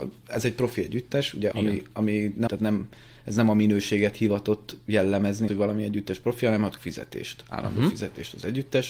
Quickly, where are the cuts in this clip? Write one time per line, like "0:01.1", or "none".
0:01.5
0:02.5
0:05.5
0:06.8